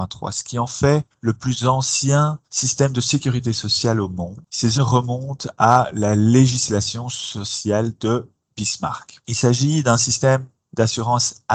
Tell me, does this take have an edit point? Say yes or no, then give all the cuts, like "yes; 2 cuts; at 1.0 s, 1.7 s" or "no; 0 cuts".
yes; 1 cut; at 4.7 s